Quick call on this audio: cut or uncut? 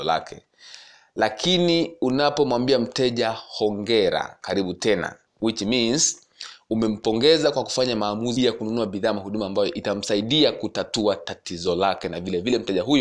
cut